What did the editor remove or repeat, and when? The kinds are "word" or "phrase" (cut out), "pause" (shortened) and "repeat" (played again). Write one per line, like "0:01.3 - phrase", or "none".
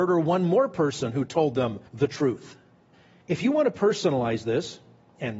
0:01.9 - pause
0:02.9 - pause